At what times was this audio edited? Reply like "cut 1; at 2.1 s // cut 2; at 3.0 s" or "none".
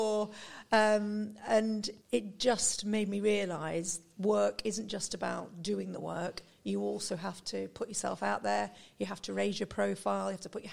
cut 1; at 2.0 s